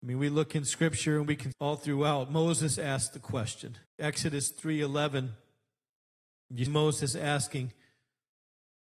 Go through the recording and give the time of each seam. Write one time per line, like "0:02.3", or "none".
0:01.5
0:03.9
0:06.7

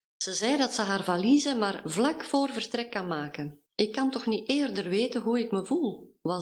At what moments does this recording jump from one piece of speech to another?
0:03.7

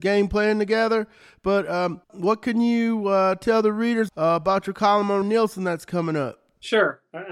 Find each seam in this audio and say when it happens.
0:02.0
0:04.1
0:05.2

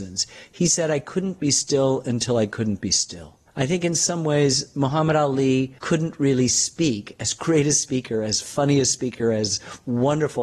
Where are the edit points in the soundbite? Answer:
0:03.5
0:05.8

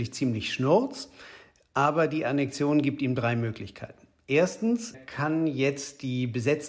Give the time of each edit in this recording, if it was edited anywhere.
0:04.9

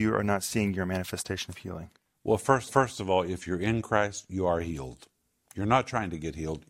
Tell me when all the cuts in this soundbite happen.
0:02.7

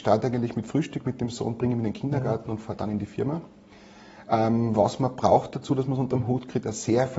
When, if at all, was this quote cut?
none

